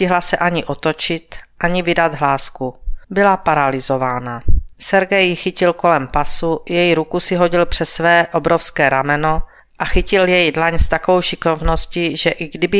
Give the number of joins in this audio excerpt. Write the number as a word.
three